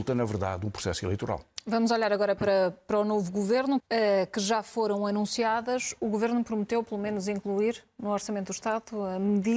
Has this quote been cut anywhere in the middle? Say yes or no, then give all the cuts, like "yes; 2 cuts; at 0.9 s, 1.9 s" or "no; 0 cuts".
yes; 1 cut; at 3.8 s